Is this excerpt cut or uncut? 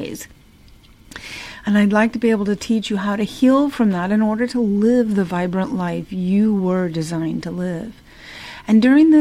uncut